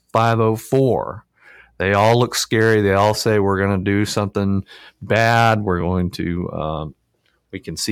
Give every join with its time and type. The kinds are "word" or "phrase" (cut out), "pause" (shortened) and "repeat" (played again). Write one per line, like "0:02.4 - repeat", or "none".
none